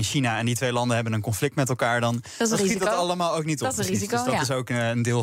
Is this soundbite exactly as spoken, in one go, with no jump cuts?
yes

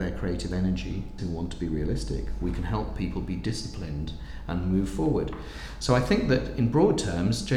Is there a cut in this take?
yes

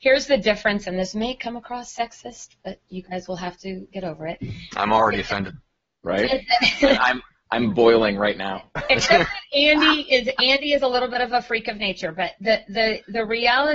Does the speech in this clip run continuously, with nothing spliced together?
yes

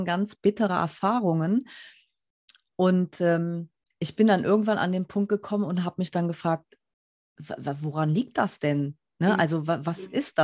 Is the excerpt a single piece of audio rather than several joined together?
yes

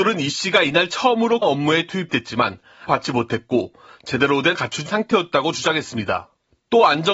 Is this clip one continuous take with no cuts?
no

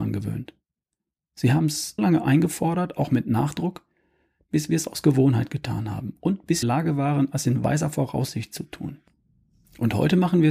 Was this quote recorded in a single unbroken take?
no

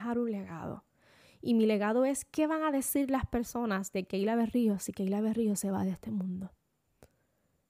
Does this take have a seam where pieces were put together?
no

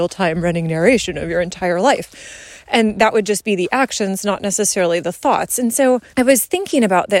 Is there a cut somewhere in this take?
yes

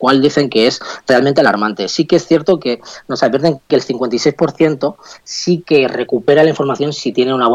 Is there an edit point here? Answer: no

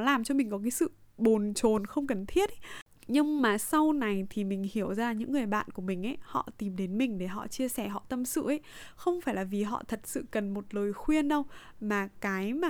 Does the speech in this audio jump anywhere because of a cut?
no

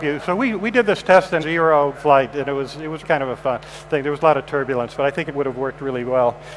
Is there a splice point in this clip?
yes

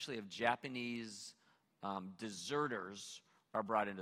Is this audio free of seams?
yes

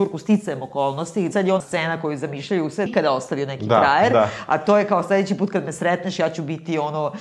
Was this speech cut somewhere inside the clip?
yes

